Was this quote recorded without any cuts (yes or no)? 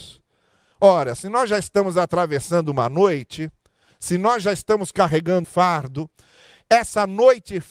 no